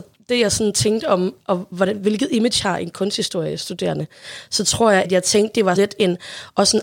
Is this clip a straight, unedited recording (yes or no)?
no